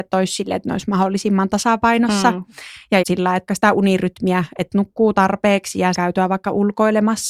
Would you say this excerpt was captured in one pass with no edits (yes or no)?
no